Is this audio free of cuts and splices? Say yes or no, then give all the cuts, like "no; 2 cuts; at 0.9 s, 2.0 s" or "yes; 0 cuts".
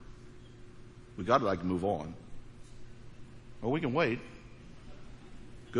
yes; 0 cuts